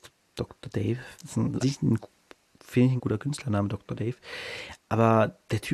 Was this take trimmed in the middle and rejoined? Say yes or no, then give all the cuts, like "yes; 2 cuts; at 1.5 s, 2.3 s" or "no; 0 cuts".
yes; 4 cuts; at 1.1 s, 1.6 s, 2.3 s, 3.0 s